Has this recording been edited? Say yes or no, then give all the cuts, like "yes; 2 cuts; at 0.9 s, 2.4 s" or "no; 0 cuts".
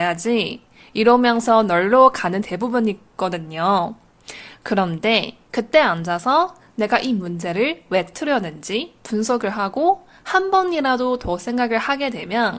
yes; 1 cut; at 2.4 s